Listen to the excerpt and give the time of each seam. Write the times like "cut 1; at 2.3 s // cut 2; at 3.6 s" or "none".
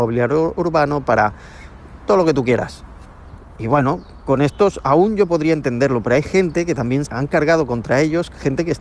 cut 1; at 7.1 s